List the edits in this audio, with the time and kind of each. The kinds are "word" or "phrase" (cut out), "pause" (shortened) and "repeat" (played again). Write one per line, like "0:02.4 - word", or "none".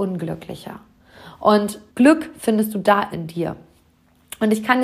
0:01.9 - pause
0:03.1 - phrase